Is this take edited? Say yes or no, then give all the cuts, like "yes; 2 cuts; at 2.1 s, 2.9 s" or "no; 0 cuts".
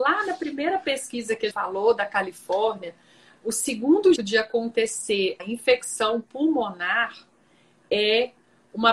yes; 3 cuts; at 1.5 s, 4.2 s, 5.4 s